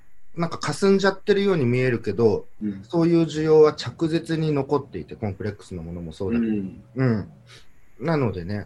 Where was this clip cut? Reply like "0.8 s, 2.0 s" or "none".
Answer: 6.9 s

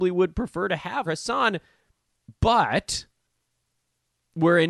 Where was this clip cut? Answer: 1.1 s, 2.3 s

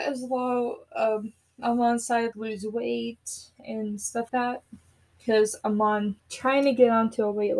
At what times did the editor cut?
2.3 s, 4.3 s, 6.2 s

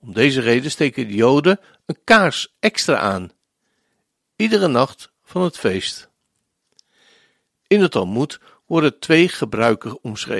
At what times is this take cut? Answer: none

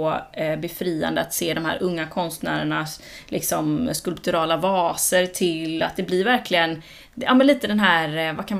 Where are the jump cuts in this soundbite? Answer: none

